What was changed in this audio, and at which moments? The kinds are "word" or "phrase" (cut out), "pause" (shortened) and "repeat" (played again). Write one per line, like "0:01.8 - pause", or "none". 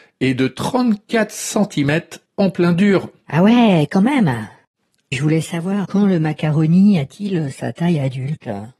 0:02.3 - pause
0:05.1 - word
0:05.8 - word